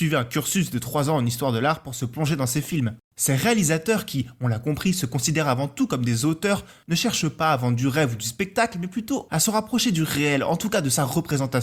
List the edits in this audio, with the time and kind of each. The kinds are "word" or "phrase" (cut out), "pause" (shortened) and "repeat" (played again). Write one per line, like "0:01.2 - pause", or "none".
0:03.0 - pause